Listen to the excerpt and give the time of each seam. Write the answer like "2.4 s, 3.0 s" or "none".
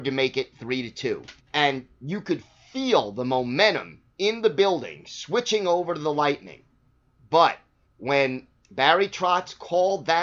1.4 s, 4.1 s, 7.9 s